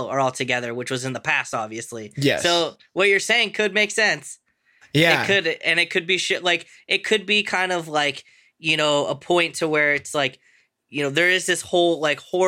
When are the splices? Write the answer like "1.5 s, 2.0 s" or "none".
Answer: none